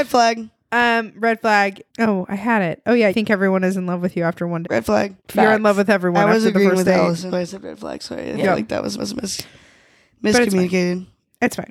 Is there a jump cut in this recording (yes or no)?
yes